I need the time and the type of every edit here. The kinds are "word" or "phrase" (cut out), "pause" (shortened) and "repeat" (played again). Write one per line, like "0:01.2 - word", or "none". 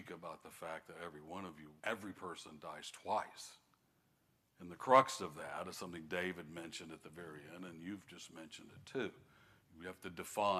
0:01.8 - pause
0:04.3 - pause